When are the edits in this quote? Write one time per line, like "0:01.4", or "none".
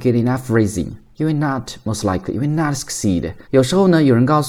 0:03.4